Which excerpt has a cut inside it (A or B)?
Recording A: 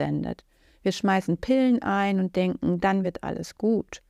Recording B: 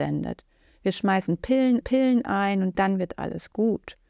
B